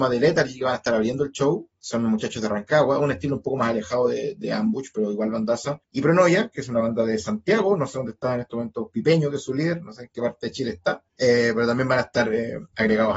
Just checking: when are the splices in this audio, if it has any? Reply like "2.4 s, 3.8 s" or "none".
5.8 s, 11.1 s